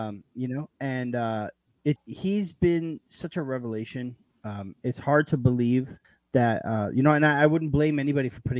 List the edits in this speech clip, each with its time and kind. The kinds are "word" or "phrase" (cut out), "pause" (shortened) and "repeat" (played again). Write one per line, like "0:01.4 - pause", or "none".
0:02.0 - word
0:06.0 - pause